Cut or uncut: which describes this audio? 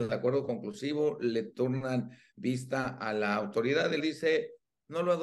cut